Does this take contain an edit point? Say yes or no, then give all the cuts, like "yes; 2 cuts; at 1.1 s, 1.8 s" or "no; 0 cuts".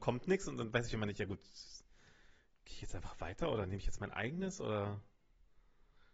no; 0 cuts